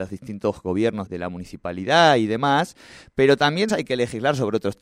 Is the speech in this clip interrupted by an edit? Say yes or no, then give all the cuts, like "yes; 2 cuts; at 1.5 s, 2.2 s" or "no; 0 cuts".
yes; 2 cuts; at 1.1 s, 3.7 s